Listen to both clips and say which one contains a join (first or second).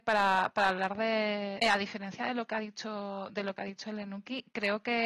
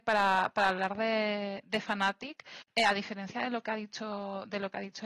first